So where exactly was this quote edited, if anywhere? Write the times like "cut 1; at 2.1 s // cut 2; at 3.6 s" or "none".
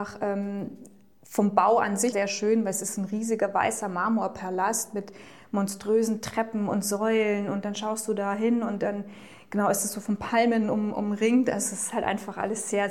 cut 1; at 2.1 s

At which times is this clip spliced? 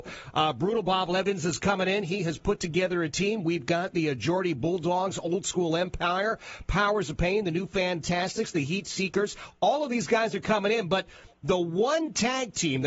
none

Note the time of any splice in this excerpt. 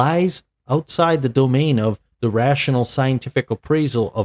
none

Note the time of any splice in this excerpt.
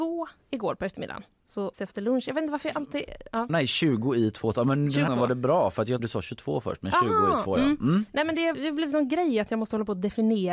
cut 1; at 1.7 s // cut 2; at 3.5 s // cut 3; at 5.1 s // cut 4; at 6.0 s // cut 5; at 8.5 s

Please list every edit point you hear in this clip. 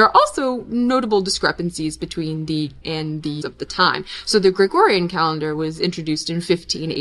cut 1; at 2.8 s // cut 2; at 3.4 s

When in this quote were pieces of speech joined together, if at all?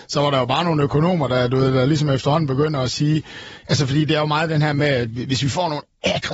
none

